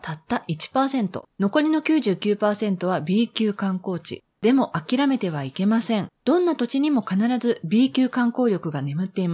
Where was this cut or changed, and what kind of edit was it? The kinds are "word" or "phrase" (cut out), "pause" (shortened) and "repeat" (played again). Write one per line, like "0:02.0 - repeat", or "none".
0:01.3 - pause
0:04.3 - pause
0:06.2 - pause